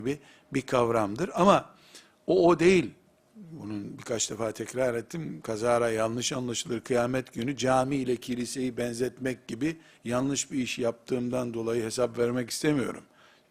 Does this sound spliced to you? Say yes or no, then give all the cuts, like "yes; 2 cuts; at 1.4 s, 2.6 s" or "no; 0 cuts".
no; 0 cuts